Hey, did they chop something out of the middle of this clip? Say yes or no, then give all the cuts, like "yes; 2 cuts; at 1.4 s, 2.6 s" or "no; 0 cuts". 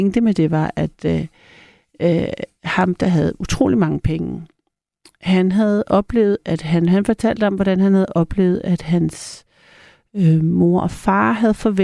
no; 0 cuts